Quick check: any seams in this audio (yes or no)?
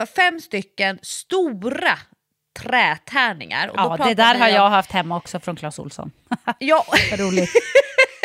no